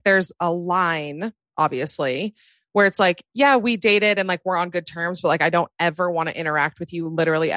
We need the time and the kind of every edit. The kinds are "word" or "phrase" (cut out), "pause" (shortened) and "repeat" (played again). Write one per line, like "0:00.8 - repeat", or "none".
none